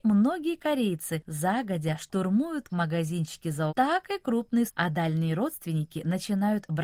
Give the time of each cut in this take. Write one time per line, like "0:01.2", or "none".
0:02.7
0:03.7
0:04.7